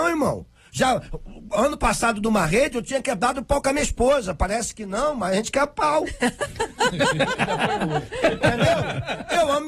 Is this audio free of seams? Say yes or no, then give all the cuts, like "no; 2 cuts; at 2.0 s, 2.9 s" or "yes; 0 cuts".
yes; 0 cuts